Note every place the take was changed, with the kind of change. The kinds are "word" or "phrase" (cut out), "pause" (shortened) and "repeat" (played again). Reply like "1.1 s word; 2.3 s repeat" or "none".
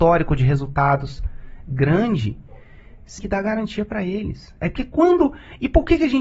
3.2 s word